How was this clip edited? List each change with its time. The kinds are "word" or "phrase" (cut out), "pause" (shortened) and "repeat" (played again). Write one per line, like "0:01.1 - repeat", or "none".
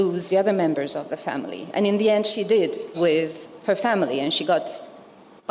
0:02.9 - phrase